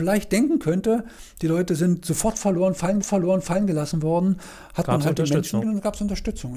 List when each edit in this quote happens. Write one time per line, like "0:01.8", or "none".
0:03.0
0:05.6

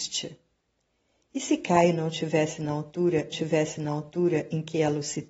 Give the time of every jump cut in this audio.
0:03.3

